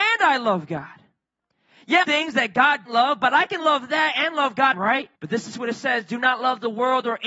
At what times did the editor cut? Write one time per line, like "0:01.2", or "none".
0:02.0
0:02.9
0:04.7
0:05.2

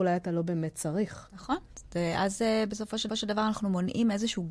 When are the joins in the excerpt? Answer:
0:03.1

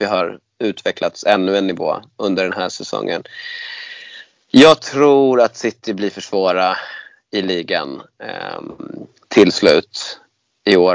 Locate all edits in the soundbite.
none

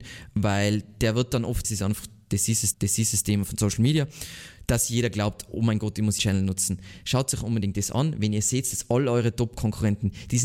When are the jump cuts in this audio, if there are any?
0:01.6
0:02.7
0:06.2

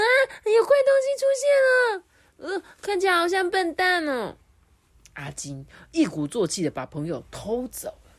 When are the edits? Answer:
none

